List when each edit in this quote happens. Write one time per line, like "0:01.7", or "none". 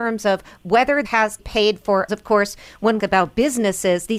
0:01.0
0:01.4
0:02.1
0:03.0